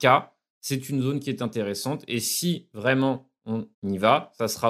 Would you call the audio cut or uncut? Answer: cut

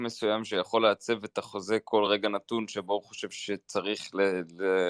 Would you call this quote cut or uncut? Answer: uncut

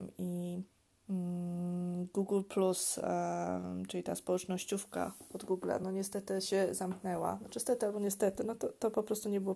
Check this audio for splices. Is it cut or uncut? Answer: uncut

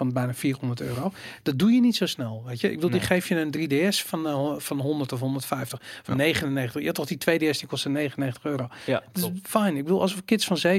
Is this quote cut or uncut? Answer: uncut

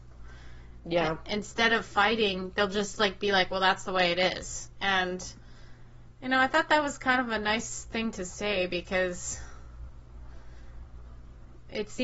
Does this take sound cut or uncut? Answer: uncut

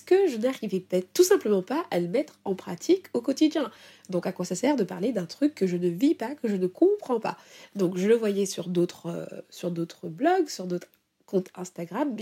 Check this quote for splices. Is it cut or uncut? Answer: uncut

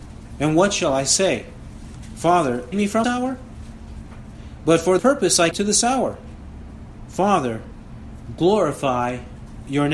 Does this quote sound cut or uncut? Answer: cut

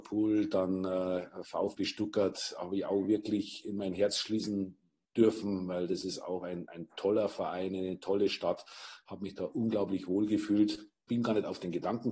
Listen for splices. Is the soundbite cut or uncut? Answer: uncut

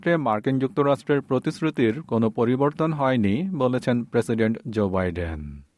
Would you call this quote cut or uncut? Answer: uncut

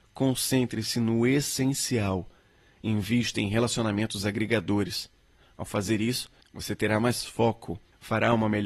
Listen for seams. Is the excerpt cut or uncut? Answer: uncut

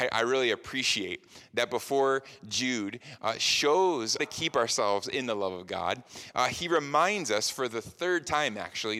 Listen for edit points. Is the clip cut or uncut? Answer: cut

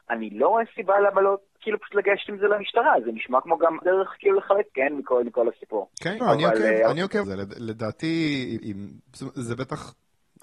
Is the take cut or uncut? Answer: cut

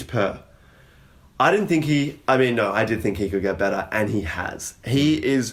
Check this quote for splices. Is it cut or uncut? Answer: uncut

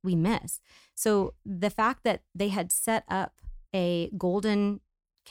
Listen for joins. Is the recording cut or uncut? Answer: cut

